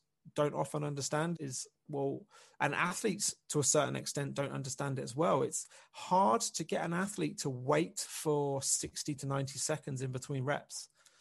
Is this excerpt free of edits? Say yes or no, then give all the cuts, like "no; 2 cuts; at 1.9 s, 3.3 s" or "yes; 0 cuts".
no; 1 cut; at 1.3 s